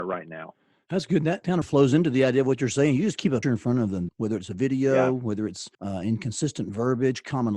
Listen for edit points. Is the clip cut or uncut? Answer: cut